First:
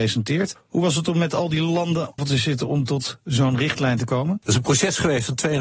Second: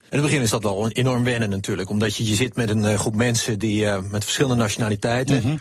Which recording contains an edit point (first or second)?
first